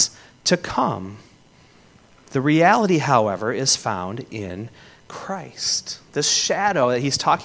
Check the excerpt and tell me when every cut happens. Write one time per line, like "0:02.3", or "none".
none